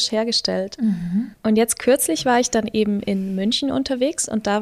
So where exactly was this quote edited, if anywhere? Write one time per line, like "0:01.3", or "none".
0:01.3